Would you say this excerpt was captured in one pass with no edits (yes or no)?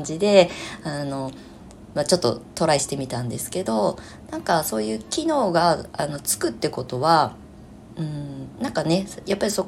yes